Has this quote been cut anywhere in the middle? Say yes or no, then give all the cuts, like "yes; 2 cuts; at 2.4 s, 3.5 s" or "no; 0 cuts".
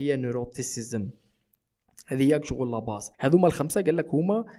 yes; 1 cut; at 3.1 s